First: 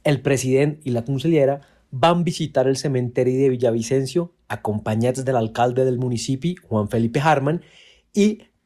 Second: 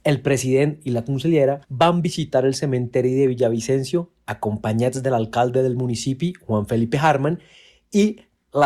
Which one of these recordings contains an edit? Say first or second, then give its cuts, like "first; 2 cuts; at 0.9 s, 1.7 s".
second; 1 cut; at 1.6 s